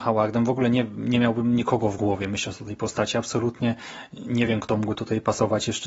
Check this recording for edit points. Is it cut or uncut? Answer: uncut